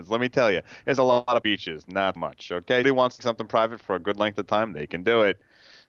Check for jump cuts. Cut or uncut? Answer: cut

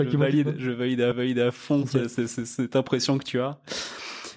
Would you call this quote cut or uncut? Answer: cut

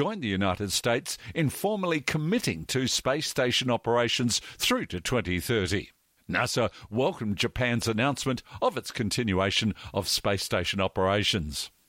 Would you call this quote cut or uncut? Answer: uncut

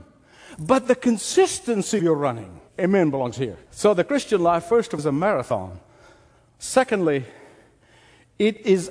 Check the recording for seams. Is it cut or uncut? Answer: cut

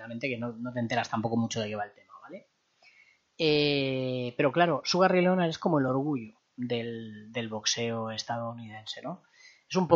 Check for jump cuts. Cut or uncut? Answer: uncut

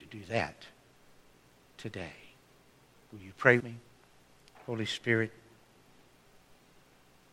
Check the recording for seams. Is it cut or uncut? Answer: cut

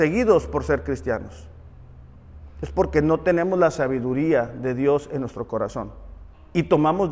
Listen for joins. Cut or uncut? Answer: uncut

